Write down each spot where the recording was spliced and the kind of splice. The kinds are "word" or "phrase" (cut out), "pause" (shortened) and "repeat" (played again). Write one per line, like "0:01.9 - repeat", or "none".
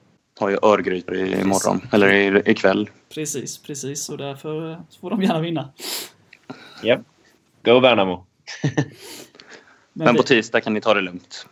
0:01.1 - phrase